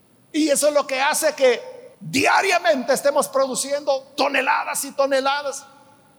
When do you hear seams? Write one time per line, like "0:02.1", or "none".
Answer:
0:01.9